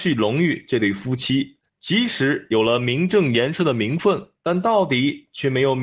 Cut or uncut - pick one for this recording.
cut